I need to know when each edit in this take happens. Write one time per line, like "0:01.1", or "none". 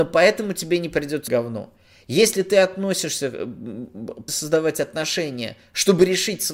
0:01.3
0:04.3